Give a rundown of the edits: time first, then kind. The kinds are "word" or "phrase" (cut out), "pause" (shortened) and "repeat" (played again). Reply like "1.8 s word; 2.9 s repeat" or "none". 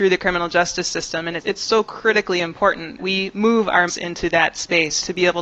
1.4 s word; 3.0 s word; 3.9 s word